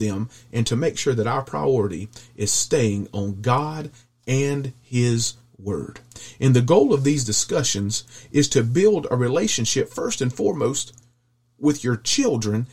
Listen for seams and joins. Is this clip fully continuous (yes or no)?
yes